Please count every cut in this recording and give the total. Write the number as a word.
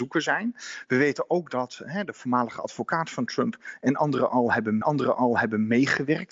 one